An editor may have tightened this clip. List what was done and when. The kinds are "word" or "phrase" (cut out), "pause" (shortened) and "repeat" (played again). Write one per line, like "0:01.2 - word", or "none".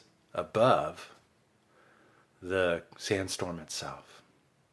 none